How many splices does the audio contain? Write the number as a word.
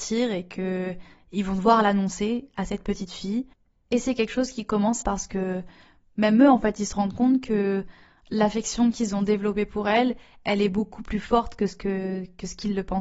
one